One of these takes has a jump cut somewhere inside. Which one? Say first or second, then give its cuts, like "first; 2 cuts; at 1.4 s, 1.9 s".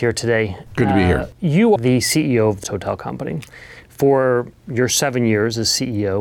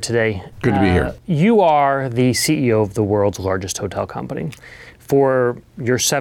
first; 2 cuts; at 1.8 s, 2.6 s